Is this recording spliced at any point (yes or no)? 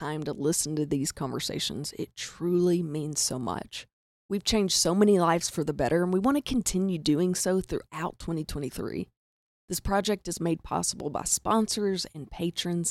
no